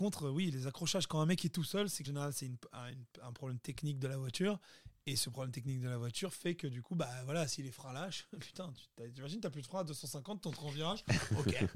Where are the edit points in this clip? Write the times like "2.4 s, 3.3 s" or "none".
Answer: 2.0 s